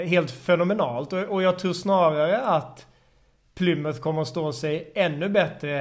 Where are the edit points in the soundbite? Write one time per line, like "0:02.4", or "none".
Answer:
none